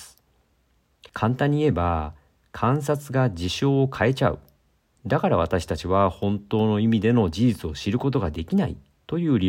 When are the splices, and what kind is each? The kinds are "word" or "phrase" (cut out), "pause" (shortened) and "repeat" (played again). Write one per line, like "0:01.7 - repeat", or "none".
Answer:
0:01.1 - pause